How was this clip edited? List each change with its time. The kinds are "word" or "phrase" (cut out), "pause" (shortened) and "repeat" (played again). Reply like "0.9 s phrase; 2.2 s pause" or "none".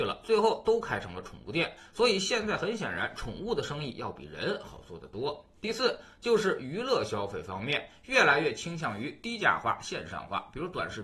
none